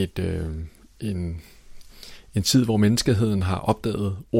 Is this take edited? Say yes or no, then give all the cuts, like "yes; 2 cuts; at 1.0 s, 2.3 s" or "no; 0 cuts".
no; 0 cuts